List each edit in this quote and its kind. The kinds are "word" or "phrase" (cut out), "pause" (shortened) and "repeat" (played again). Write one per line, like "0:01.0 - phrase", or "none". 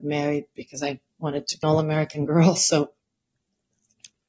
0:01.1 - pause
0:01.6 - word